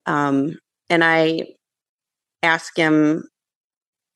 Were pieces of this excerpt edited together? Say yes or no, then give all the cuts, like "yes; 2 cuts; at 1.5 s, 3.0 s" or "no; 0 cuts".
no; 0 cuts